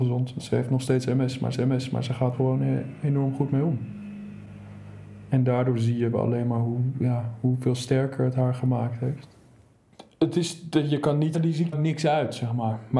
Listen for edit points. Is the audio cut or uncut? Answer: cut